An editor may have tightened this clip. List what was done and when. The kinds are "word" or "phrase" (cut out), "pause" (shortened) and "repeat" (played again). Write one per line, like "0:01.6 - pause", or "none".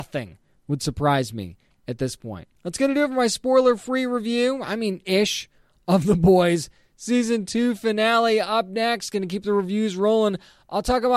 0:02.6 - pause